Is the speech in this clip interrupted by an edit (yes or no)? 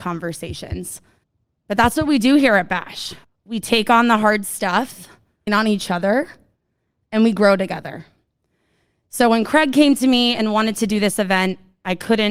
yes